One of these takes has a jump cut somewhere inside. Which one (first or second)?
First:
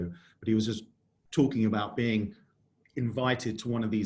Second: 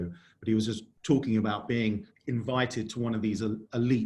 second